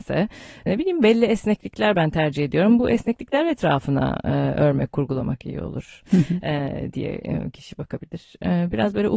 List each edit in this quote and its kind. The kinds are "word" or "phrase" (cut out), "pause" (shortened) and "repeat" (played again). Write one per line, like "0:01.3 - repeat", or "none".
none